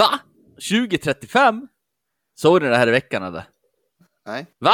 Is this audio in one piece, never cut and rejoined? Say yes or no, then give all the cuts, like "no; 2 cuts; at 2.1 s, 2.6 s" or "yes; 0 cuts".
yes; 0 cuts